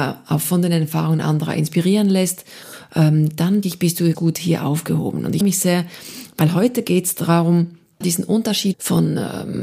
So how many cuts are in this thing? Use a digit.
5